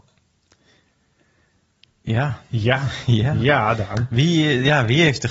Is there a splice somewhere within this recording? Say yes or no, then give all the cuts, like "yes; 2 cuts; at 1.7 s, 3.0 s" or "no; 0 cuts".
no; 0 cuts